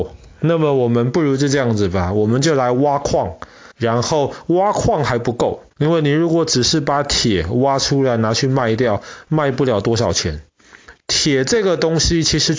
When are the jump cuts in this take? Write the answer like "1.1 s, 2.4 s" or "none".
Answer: 3.7 s, 5.7 s